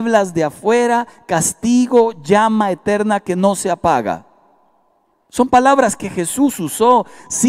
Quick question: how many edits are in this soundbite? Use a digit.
0